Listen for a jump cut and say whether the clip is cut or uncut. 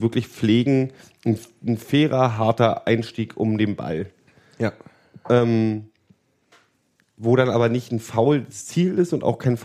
cut